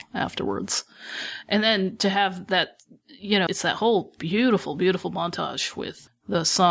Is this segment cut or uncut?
cut